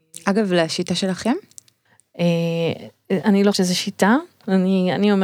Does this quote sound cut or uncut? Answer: cut